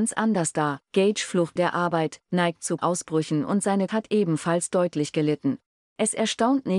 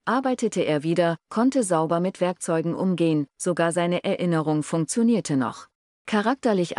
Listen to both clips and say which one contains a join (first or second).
first